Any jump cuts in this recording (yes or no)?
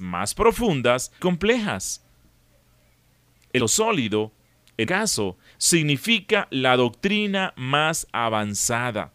yes